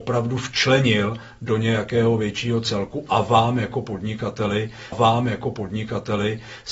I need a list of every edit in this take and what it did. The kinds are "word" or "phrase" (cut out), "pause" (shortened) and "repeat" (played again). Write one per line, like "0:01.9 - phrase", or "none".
0:04.9 - repeat